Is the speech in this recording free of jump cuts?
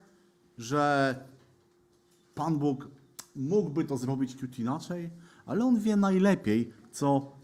yes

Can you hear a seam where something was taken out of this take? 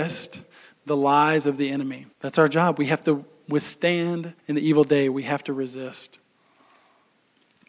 yes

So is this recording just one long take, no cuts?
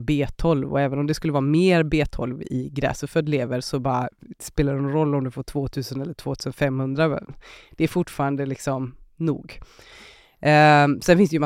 yes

